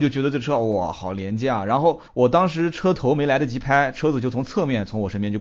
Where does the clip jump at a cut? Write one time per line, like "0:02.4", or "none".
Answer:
0:02.1